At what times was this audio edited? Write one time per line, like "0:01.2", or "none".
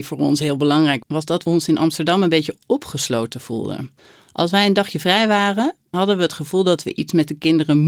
0:01.0
0:05.9

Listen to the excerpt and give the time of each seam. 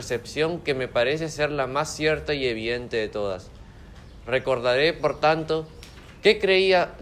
none

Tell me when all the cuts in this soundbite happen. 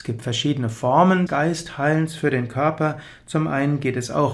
0:01.3

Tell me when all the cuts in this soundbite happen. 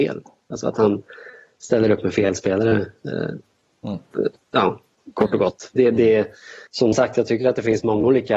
0:06.7

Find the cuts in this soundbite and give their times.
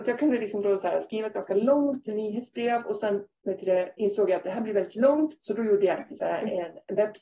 none

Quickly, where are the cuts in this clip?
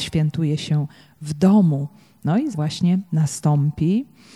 0:02.5
0:03.1

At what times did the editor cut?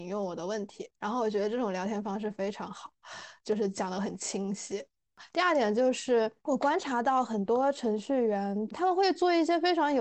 0:00.9
0:03.4
0:08.7

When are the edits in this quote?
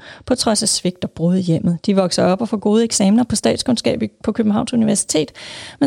none

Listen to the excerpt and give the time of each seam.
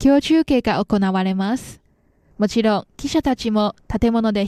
none

